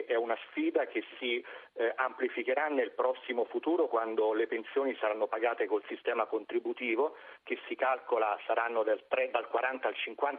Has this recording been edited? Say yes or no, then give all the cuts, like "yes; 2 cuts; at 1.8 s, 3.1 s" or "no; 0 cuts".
no; 0 cuts